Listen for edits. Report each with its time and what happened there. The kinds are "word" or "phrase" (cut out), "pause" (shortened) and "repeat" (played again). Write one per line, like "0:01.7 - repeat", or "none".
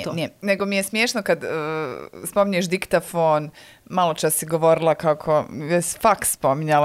none